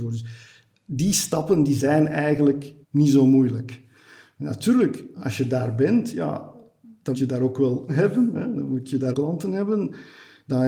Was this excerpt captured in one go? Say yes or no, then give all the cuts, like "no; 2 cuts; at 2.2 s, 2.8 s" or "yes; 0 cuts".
no; 5 cuts; at 2.8 s, 5.1 s, 7.1 s, 7.9 s, 9.1 s